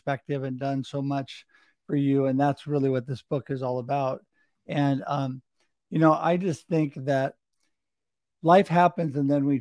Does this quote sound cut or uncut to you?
uncut